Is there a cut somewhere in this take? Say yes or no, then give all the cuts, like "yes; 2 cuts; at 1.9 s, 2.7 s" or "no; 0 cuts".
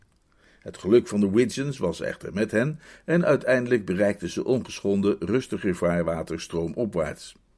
no; 0 cuts